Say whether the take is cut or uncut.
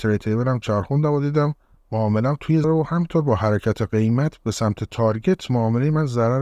cut